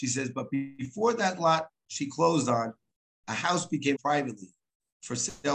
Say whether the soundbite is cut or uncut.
cut